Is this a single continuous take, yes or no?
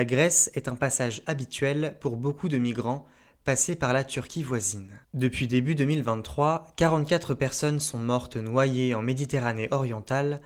no